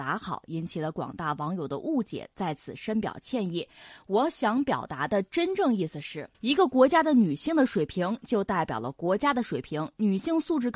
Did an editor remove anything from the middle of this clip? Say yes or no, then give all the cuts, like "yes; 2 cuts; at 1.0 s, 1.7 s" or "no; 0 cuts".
yes; 1 cut; at 6.3 s